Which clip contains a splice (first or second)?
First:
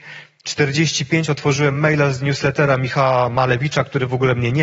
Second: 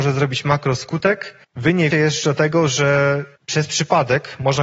second